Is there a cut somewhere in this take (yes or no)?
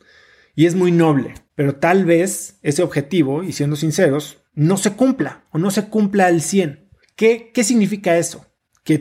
yes